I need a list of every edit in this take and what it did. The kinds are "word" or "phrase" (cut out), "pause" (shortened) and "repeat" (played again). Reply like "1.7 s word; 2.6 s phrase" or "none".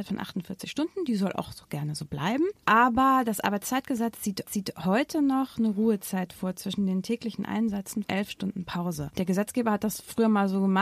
4.5 s repeat; 8.0 s word